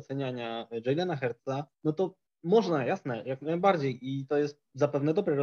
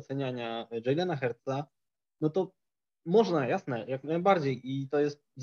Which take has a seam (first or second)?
first